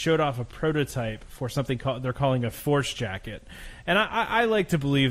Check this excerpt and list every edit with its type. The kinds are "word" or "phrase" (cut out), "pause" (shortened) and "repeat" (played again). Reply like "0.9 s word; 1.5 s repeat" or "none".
none